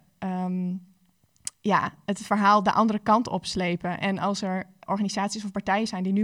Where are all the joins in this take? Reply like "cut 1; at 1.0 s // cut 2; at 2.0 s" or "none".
cut 1; at 4.9 s

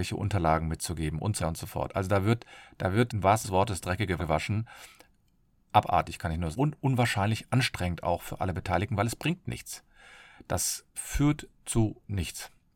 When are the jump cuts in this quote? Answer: cut 1; at 1.4 s // cut 2; at 3.1 s // cut 3; at 3.4 s // cut 4; at 4.2 s // cut 5; at 6.5 s // cut 6; at 10.9 s

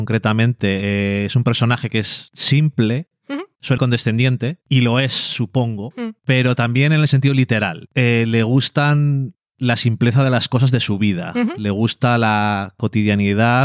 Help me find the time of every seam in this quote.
cut 1; at 3.8 s

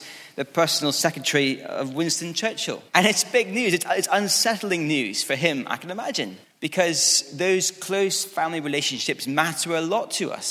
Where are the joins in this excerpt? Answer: cut 1; at 2.9 s // cut 2; at 6.4 s

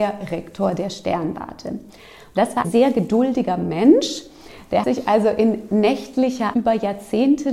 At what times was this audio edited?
cut 1; at 2.6 s // cut 2; at 4.8 s // cut 3; at 6.5 s

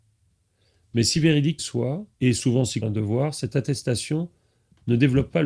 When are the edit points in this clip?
cut 1; at 1.6 s // cut 2; at 2.1 s // cut 3; at 2.8 s

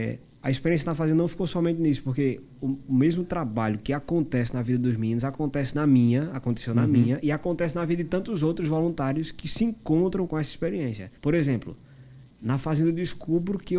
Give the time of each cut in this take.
cut 1; at 10.3 s // cut 2; at 11.2 s

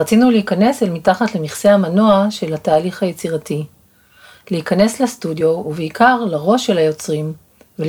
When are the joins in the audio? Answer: none

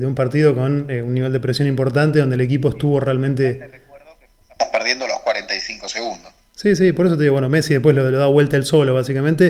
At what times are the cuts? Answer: none

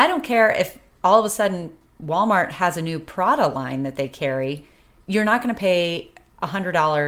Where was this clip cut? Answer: none

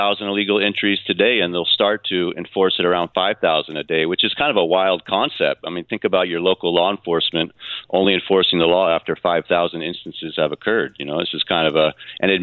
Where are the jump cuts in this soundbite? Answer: none

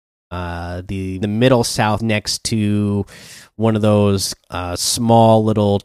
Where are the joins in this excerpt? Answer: cut 1; at 1.2 s // cut 2; at 2.0 s // cut 3; at 4.4 s

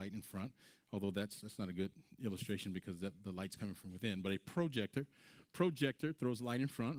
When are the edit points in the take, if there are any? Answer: none

